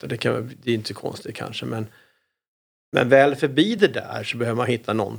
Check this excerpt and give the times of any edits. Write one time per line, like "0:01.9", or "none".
none